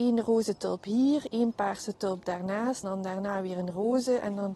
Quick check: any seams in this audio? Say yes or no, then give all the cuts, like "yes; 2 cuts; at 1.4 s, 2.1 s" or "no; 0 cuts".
yes; 1 cut; at 2.8 s